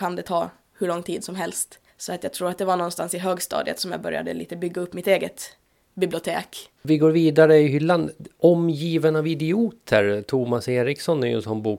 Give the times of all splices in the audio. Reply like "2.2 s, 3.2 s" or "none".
1.9 s, 6.8 s